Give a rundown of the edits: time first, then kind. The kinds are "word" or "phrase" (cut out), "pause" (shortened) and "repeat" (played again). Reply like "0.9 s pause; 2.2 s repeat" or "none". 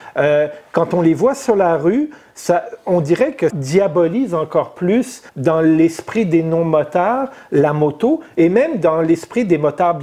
3.5 s word; 5.3 s pause